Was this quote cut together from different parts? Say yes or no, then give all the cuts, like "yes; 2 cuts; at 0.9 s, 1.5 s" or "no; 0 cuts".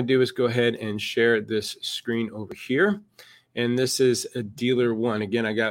no; 0 cuts